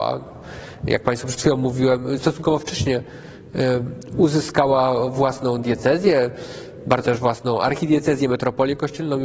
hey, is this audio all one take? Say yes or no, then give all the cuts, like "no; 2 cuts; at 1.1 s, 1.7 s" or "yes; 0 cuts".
no; 1 cut; at 7.0 s